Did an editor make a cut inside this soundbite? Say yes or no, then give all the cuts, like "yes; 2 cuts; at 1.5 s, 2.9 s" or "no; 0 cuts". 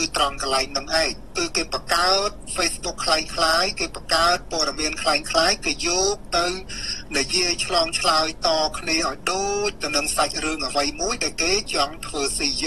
no; 0 cuts